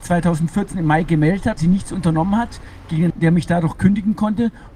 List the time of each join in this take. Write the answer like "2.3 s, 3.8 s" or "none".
1.6 s, 3.1 s